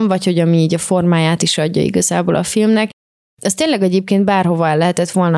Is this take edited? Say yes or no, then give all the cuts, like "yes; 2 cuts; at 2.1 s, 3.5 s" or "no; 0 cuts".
no; 0 cuts